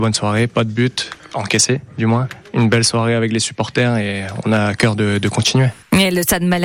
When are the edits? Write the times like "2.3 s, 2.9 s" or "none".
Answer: none